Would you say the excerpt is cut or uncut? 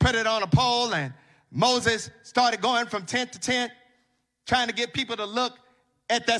uncut